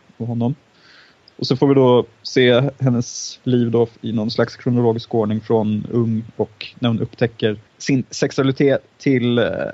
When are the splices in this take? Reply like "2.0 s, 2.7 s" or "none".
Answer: 3.9 s, 7.7 s